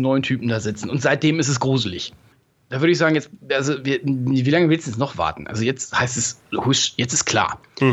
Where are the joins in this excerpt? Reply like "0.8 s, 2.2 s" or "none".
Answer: none